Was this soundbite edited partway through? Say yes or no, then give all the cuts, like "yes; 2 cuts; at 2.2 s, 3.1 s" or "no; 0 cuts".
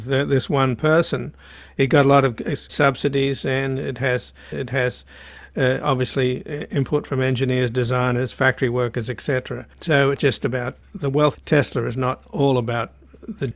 yes; 5 cuts; at 2.7 s, 4.5 s, 9.7 s, 10.2 s, 11.3 s